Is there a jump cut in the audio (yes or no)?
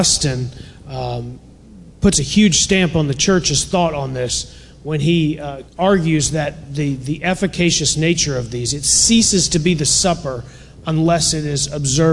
yes